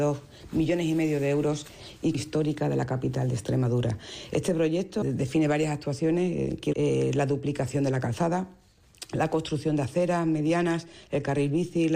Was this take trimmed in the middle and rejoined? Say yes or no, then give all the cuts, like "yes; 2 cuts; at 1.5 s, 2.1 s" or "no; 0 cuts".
yes; 3 cuts; at 2.1 s, 5.0 s, 6.7 s